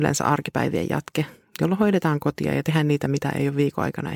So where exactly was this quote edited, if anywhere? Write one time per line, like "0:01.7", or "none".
none